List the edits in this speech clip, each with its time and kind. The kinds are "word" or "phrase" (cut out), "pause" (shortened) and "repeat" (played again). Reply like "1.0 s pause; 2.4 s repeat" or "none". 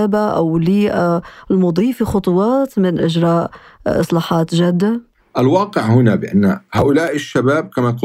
3.0 s word